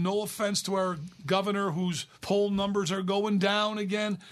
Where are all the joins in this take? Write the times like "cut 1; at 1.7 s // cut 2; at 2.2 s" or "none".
cut 1; at 2.1 s